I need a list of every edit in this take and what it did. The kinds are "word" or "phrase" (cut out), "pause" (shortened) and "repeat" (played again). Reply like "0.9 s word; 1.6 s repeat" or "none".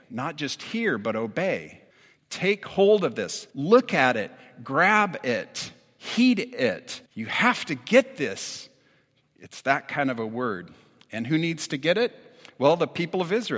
1.9 s pause; 3.5 s pause; 7.1 s pause

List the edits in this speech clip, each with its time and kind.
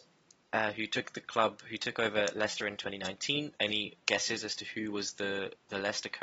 3.6 s pause

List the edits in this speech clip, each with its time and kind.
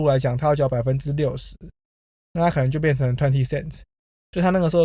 none

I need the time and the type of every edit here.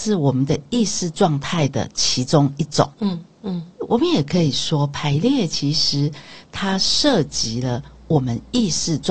2.9 s pause; 3.7 s pause

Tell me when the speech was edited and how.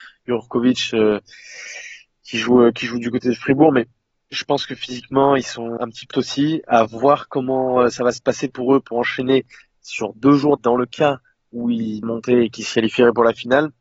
5.8 s word; 6.1 s word; 10.6 s word; 12.0 s word

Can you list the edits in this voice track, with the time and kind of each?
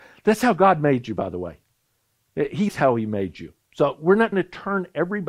2.7 s word; 4.3 s word

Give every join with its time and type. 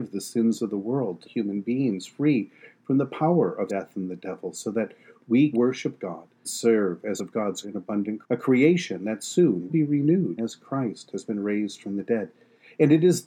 1.2 s word; 3.7 s word; 5.5 s word; 6.4 s word; 7.2 s word; 7.6 s word; 8.2 s word; 9.7 s word; 10.4 s word

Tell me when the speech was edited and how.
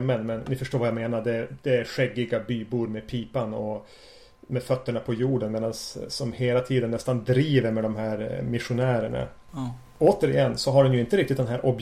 none

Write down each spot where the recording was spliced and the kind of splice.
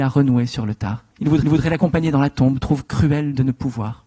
1.1 s pause; 1.4 s repeat

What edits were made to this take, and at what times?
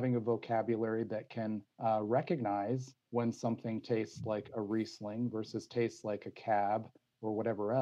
1.7 s pause; 3.0 s pause

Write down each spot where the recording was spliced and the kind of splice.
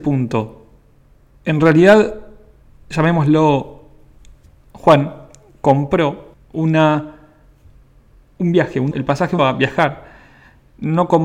2.7 s pause; 6.3 s pause; 8.9 s word; 9.4 s word

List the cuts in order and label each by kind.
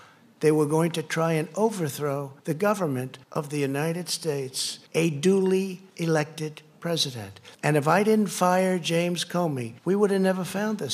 2.4 s pause; 3.2 s pause; 4.9 s pause; 5.9 s pause; 7.5 s pause; 9.8 s pause

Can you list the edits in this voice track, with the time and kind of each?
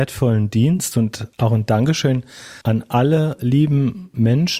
1.3 s pause; 2.6 s pause

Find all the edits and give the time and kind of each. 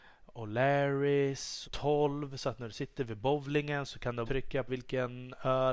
1.6 s word; 4.3 s word; 4.7 s word

